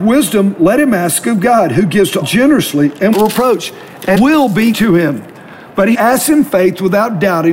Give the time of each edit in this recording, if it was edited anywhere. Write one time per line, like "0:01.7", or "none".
0:02.2
0:03.1
0:04.2
0:04.7
0:05.9